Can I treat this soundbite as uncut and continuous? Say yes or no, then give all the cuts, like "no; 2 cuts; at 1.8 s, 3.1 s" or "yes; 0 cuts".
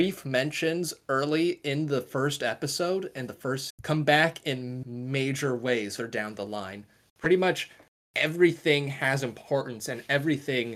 no; 3 cuts; at 3.7 s, 4.8 s, 6.0 s